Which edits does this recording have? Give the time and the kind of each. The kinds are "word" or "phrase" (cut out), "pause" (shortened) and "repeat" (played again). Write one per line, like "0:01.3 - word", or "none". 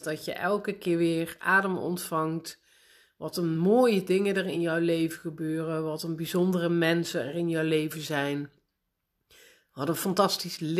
none